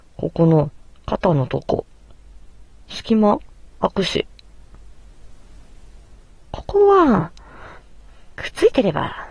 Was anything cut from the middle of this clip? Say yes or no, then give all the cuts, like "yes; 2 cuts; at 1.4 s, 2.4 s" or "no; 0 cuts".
no; 0 cuts